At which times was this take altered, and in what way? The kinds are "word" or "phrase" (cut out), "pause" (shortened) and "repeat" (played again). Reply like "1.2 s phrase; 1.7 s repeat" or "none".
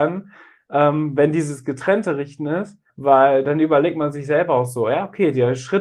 2.9 s pause